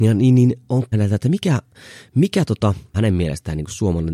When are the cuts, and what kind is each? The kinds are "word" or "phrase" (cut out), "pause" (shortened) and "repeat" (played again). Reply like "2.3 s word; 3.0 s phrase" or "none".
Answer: 0.9 s word; 2.9 s phrase